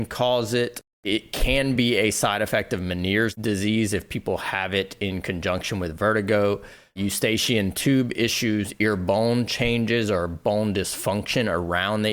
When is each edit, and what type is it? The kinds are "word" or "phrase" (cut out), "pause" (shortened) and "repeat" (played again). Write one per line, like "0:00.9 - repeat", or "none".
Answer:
none